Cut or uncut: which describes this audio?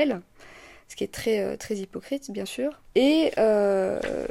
uncut